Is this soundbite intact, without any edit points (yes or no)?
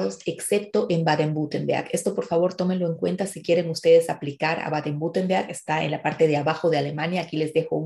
yes